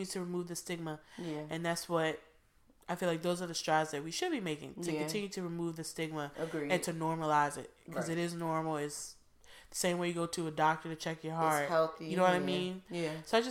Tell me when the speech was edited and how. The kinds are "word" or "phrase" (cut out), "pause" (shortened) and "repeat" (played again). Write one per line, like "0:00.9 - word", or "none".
none